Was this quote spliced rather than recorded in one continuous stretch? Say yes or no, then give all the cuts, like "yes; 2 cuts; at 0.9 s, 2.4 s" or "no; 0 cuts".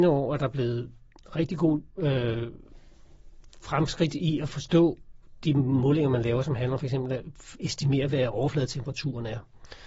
no; 0 cuts